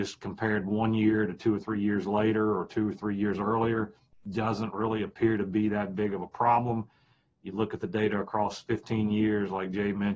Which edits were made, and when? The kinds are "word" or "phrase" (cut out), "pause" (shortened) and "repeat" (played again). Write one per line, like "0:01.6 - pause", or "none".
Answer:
none